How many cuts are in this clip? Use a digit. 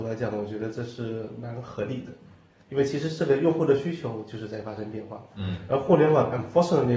0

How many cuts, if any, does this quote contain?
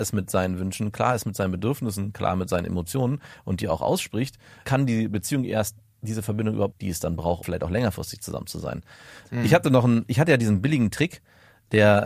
2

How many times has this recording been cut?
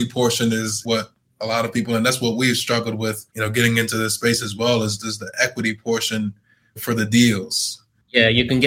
1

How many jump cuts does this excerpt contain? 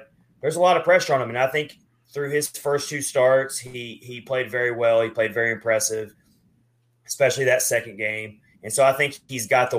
1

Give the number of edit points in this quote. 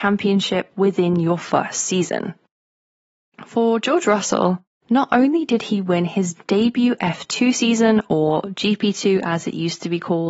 0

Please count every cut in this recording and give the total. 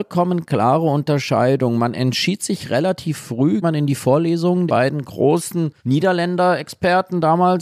3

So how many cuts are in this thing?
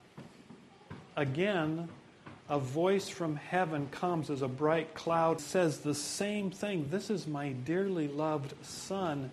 1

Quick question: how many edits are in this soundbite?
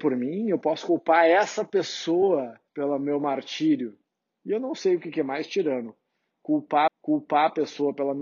3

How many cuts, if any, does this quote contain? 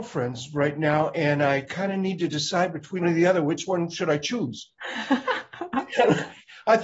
1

